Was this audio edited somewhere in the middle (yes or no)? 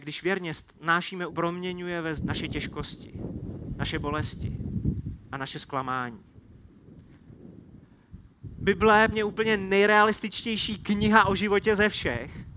yes